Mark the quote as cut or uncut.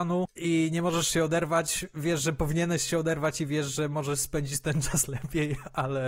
uncut